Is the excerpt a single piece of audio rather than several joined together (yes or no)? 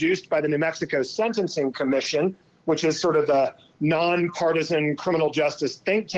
yes